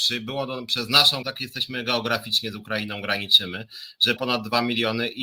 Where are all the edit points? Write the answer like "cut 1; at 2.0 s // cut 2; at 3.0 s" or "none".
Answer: cut 1; at 1.2 s // cut 2; at 4.2 s